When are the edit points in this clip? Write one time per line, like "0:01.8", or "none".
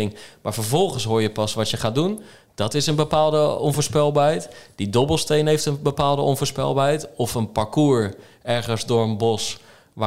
none